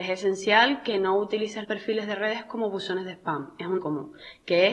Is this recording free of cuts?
no; 2 cuts; at 1.6 s, 3.8 s

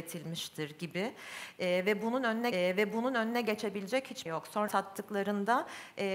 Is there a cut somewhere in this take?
yes; 3 cuts; at 2.5 s, 4.3 s, 4.7 s

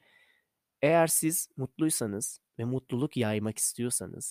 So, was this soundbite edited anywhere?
yes; 1 cut; at 2.5 s

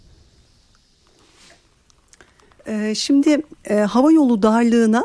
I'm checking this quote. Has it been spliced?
no; 0 cuts

